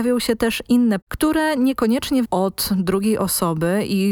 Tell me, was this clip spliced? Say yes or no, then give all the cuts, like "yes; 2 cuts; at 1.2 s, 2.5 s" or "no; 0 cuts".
yes; 2 cuts; at 1.0 s, 2.2 s